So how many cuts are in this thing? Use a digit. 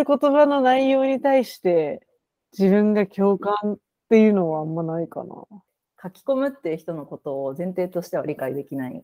0